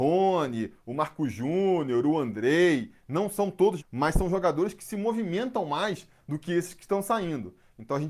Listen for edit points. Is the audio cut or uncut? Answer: cut